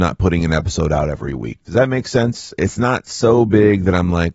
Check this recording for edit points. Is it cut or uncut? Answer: uncut